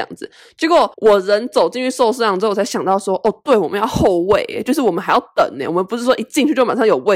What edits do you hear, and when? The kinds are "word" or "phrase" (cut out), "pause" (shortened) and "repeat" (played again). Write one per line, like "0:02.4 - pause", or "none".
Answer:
0:00.9 - pause